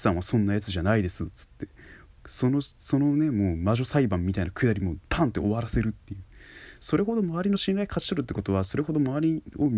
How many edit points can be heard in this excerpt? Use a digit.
0